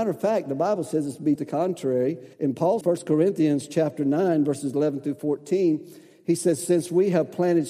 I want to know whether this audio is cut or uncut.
cut